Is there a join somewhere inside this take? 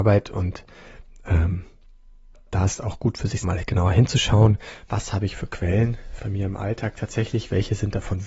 yes; 3 cuts; at 2.8 s, 3.4 s, 6.2 s

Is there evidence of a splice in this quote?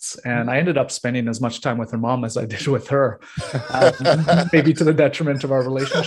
no; 0 cuts

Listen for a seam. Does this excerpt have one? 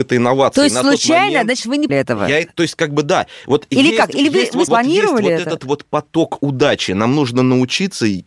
yes; 2 cuts; at 1.9 s, 4.7 s

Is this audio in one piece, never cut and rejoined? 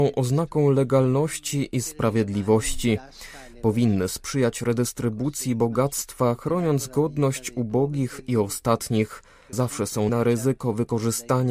no; 2 cuts; at 9.5 s, 10.1 s

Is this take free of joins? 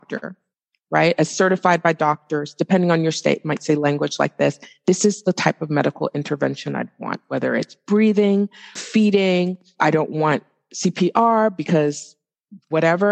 yes; 0 cuts

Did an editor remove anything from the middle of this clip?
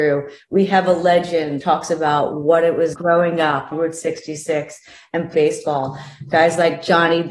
yes; 4 cuts; at 1.6 s, 2.9 s, 3.7 s, 5.3 s

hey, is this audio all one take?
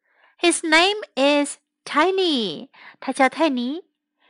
yes; 0 cuts

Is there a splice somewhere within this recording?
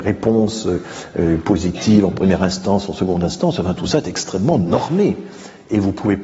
no; 0 cuts

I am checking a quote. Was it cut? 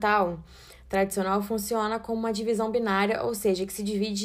no; 0 cuts

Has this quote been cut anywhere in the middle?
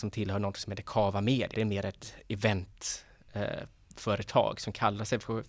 yes; 1 cut; at 1.5 s

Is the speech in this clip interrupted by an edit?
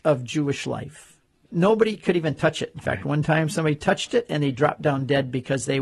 no; 0 cuts

